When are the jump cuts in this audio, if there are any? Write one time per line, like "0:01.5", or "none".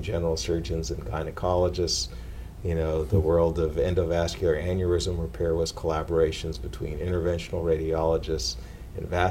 none